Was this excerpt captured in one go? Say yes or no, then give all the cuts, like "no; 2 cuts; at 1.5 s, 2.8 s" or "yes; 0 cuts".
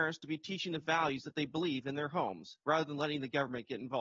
no; 1 cut; at 2.6 s